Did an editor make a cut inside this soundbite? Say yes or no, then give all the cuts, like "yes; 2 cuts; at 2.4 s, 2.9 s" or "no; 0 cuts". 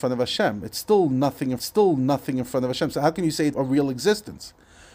yes; 2 cuts; at 1.6 s, 3.5 s